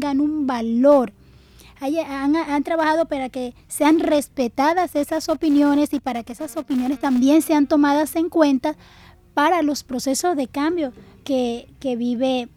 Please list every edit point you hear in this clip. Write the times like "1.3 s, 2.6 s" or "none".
none